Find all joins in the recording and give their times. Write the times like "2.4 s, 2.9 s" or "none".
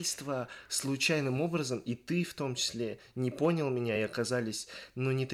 none